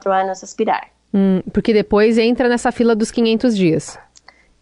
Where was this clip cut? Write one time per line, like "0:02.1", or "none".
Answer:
none